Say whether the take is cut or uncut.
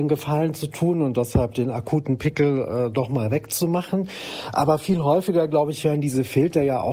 uncut